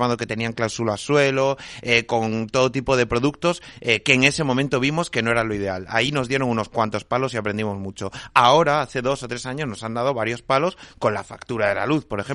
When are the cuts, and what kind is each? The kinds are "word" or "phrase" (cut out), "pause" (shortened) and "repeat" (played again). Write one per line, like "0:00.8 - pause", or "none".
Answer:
none